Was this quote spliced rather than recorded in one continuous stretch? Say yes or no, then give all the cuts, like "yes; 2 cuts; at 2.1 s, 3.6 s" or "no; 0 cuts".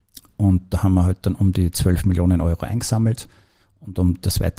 no; 0 cuts